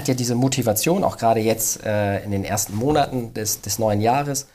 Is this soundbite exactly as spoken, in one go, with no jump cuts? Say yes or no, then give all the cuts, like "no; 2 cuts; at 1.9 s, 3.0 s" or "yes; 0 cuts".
yes; 0 cuts